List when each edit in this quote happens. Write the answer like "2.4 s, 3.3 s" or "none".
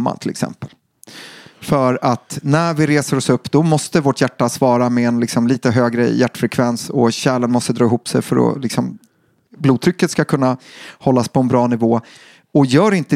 none